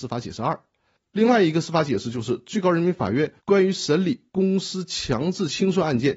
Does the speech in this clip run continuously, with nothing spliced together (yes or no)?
no